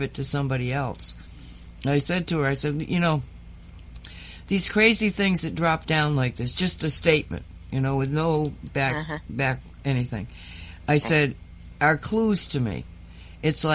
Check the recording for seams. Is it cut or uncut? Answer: uncut